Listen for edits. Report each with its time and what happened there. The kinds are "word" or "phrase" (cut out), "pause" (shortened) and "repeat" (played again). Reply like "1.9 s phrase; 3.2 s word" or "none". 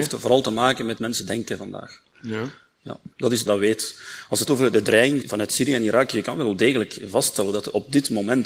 1.0 s phrase; 3.1 s pause; 3.5 s phrase; 4.5 s word; 5.2 s word